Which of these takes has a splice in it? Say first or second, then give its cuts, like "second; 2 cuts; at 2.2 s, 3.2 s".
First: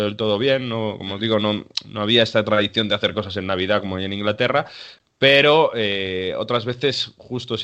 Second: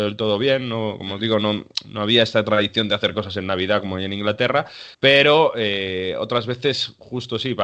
second; 1 cut; at 4.9 s